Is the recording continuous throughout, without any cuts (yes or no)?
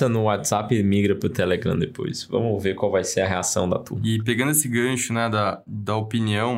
yes